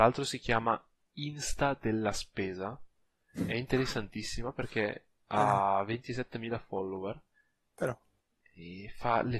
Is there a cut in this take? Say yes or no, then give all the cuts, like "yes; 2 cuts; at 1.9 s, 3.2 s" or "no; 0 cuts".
no; 0 cuts